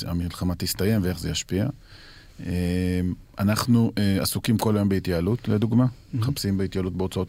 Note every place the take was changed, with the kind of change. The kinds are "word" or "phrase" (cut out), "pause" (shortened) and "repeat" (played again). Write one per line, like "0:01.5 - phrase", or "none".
none